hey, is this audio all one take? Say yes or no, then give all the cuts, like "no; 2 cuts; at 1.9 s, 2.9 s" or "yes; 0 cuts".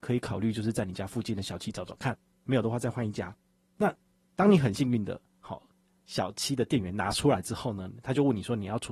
yes; 0 cuts